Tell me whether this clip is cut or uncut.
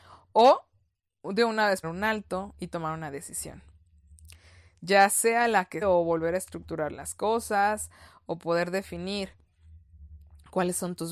cut